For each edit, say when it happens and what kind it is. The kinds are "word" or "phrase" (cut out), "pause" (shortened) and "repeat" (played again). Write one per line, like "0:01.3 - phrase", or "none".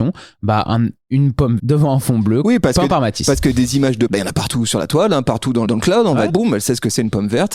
0:01.0 - pause
0:01.6 - word
0:04.1 - phrase
0:05.6 - word
0:06.3 - word